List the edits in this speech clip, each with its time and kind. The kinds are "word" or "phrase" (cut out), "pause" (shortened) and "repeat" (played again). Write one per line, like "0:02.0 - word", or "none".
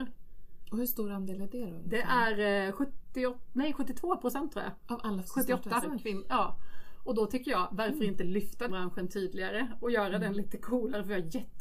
0:05.2 - word
0:05.8 - phrase
0:08.7 - word